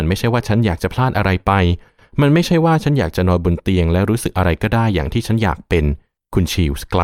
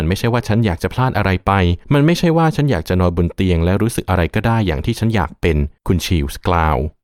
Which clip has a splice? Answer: second; 2 cuts; at 1.8 s, 5.8 s

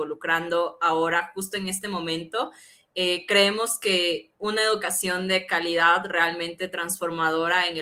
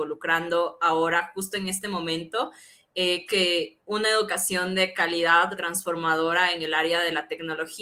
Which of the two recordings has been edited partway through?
second; 2 cuts; at 3.3 s, 5.5 s

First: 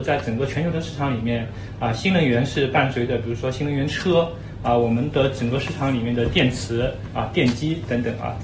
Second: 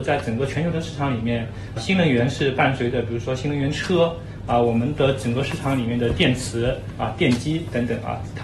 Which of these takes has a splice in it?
second; 1 cut; at 1.8 s

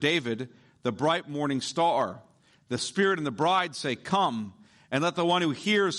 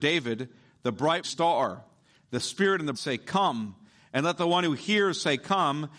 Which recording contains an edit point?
second; 2 cuts; at 1.2 s, 2.9 s

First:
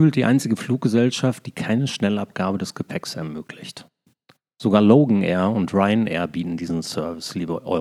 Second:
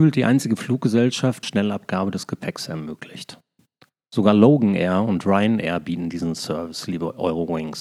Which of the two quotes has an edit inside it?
second; 1 cut; at 1.4 s

